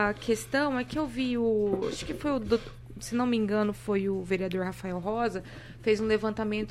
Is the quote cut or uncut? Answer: uncut